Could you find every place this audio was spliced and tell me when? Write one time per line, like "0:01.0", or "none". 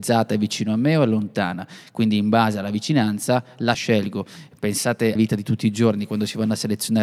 0:03.7
0:05.2